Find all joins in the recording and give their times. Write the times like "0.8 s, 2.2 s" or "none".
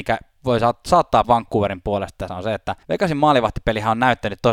1.2 s, 2.3 s, 2.8 s